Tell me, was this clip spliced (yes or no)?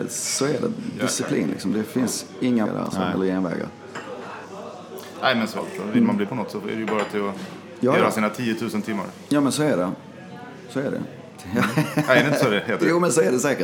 yes